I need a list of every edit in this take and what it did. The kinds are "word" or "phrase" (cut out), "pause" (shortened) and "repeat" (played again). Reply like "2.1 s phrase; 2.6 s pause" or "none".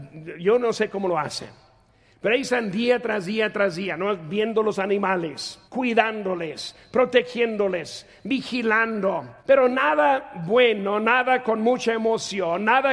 5.7 s pause; 9.4 s pause